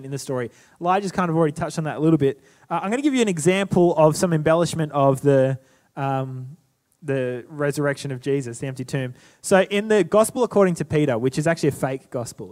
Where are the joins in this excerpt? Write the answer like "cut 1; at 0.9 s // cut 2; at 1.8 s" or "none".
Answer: none